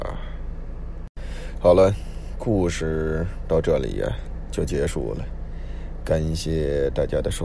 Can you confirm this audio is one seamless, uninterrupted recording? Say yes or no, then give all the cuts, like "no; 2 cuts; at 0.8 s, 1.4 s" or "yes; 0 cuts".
yes; 0 cuts